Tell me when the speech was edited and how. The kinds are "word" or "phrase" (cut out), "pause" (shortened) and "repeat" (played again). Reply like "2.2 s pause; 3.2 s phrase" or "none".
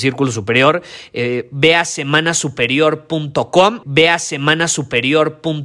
3.8 s repeat